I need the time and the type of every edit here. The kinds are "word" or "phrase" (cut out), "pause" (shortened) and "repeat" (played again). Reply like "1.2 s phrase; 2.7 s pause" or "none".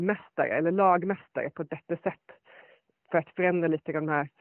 none